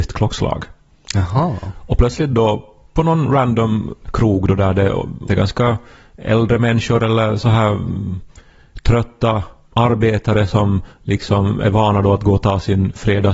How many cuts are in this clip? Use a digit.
1